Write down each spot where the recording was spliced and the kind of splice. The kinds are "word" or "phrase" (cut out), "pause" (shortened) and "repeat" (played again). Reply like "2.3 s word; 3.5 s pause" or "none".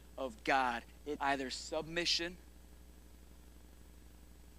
1.2 s word